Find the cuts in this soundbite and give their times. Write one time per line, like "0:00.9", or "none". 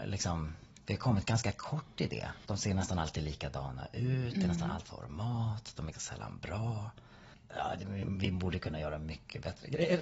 0:04.9
0:05.9
0:07.3